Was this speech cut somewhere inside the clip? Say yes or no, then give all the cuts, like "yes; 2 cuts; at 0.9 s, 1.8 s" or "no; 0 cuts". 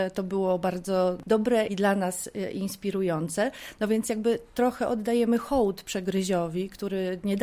yes; 1 cut; at 1.7 s